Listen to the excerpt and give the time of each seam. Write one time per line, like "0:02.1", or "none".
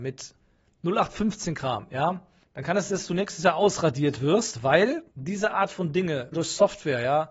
0:02.4
0:02.9
0:05.1
0:06.3